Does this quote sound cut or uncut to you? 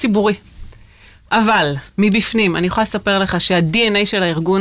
cut